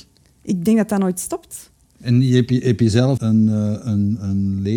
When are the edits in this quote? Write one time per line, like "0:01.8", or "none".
0:03.2